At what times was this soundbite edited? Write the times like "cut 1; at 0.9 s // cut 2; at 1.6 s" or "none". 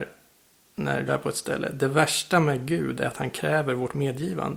cut 1; at 1.1 s